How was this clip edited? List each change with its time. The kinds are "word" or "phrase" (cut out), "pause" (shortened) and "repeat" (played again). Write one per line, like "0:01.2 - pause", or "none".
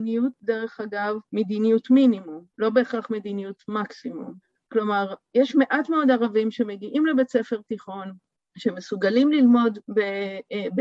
0:01.3 - pause
0:02.5 - pause
0:04.4 - pause
0:08.4 - pause
0:09.8 - pause